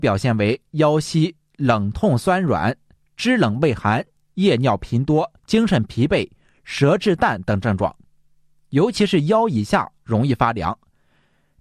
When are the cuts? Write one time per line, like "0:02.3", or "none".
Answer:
0:05.4